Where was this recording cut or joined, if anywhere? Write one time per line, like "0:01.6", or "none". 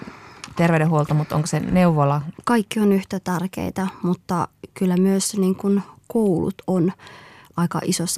none